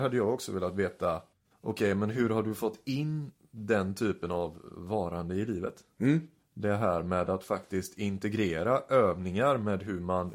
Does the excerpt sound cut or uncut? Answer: uncut